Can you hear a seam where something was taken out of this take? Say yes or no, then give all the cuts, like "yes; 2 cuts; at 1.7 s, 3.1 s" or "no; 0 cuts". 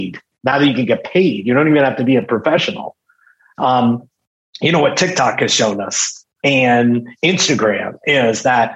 no; 0 cuts